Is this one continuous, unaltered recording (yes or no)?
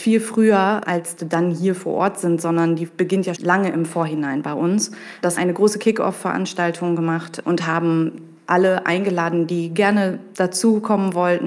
no